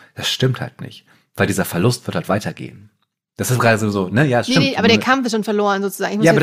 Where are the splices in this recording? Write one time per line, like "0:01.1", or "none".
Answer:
none